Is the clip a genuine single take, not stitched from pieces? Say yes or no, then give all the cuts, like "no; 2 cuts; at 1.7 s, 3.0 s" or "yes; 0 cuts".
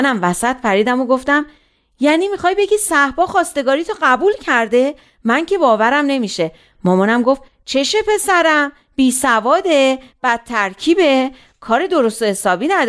yes; 0 cuts